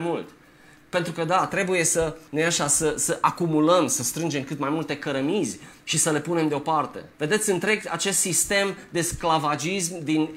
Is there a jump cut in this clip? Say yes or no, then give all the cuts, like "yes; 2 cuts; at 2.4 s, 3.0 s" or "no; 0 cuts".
yes; 3 cuts; at 2.3 s, 5.8 s, 7.1 s